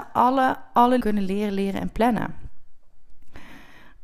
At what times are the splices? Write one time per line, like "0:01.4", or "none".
0:01.0